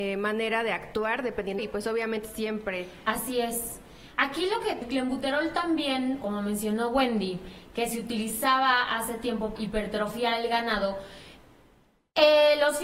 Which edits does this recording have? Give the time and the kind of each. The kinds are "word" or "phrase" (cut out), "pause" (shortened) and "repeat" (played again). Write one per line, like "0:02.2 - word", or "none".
0:01.6 - phrase
0:02.2 - phrase
0:04.8 - word
0:06.2 - word
0:09.6 - word